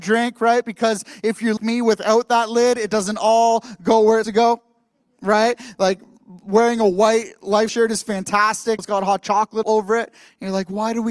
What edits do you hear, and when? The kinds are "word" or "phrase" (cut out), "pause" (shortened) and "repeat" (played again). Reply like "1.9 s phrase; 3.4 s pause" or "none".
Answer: 1.6 s word; 4.2 s word; 7.7 s word; 8.8 s word; 9.6 s word